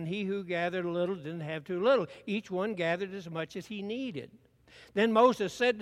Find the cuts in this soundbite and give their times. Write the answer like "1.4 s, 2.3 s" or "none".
none